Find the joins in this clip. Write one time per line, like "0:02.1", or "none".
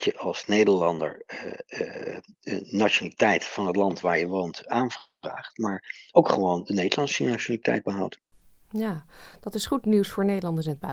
none